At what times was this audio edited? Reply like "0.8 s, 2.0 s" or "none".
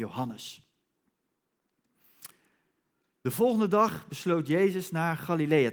none